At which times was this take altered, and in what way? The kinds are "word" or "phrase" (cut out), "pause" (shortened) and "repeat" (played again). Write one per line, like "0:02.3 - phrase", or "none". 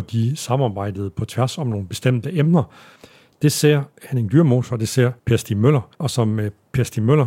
0:03.9 - pause
0:05.2 - pause
0:05.9 - pause